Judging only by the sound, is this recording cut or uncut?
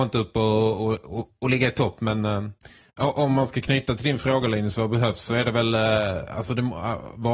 uncut